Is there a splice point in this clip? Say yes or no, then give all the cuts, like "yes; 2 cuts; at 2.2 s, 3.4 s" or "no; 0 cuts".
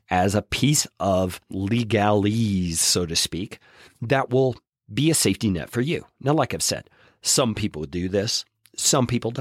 no; 0 cuts